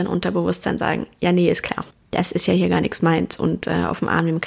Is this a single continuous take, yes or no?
no